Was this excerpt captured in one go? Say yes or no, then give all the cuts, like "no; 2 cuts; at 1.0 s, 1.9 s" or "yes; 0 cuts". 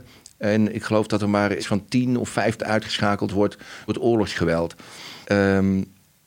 no; 4 cuts; at 1.6 s, 2.6 s, 3.9 s, 5.2 s